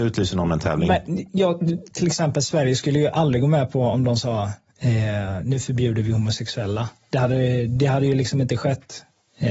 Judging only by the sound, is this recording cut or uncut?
uncut